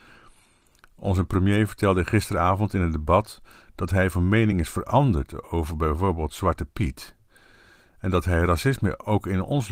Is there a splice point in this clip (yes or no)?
no